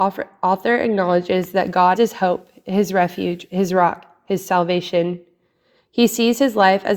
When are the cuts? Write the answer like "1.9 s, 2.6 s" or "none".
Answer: 2.0 s